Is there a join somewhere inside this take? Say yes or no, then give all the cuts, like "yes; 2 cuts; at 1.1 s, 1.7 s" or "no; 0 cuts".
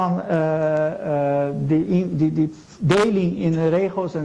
no; 0 cuts